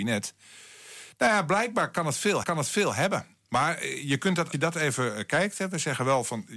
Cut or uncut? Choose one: cut